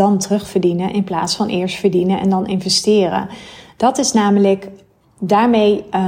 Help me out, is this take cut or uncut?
uncut